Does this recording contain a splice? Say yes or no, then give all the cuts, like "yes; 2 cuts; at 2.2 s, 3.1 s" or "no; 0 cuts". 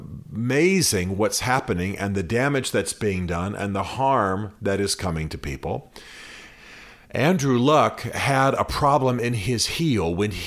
no; 0 cuts